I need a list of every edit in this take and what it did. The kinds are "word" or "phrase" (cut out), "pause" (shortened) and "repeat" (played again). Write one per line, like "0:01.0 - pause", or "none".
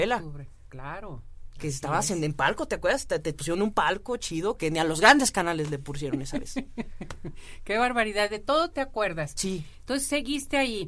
0:04.6 - word

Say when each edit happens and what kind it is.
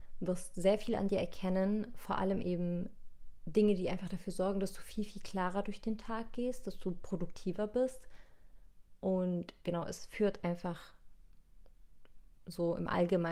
none

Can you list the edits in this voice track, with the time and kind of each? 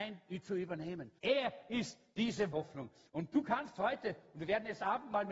0:01.2 - pause
0:02.5 - word

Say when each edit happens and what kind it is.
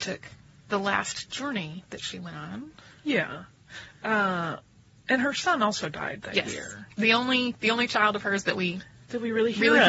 none

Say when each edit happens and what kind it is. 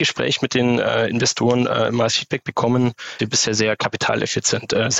0:03.2 - phrase

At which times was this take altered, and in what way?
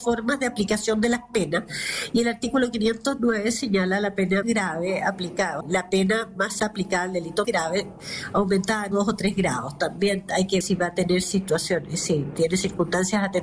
0:04.4 - word
0:05.6 - word
0:06.6 - word
0:07.4 - word
0:08.9 - word
0:10.6 - word

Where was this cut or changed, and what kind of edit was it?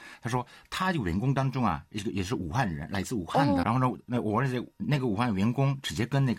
0:03.6 - word

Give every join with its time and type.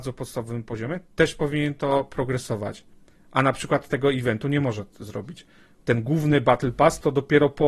none

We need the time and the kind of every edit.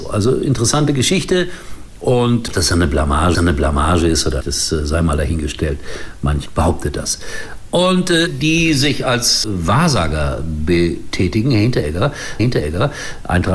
0:02.5 - word
0:03.3 - repeat
0:04.4 - word
0:06.5 - word
0:08.3 - phrase
0:09.4 - word
0:12.4 - repeat

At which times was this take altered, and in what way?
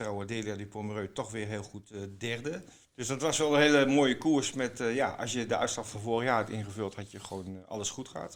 0:02.8 - pause

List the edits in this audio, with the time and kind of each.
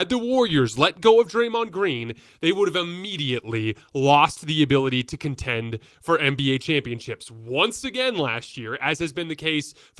none

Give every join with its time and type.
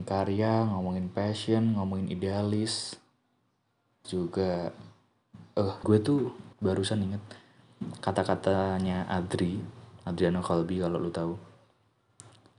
0:04.0 - word
0:05.8 - word
0:06.5 - pause

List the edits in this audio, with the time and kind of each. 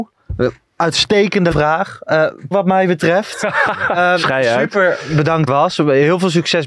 0:01.5 - word
0:02.5 - word
0:05.5 - phrase

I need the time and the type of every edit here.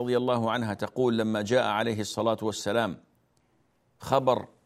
none

